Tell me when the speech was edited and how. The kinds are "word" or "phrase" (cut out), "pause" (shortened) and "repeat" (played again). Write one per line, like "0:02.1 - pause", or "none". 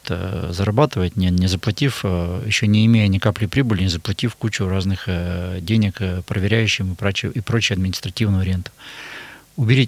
none